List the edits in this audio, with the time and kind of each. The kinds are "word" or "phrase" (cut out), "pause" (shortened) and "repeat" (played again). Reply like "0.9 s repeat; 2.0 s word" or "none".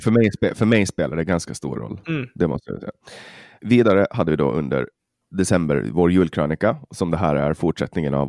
none